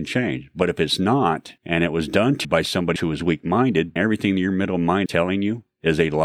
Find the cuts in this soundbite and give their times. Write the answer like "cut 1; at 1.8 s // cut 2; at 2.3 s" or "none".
cut 1; at 1.6 s // cut 2; at 2.4 s // cut 3; at 3.0 s // cut 4; at 4.0 s // cut 5; at 5.1 s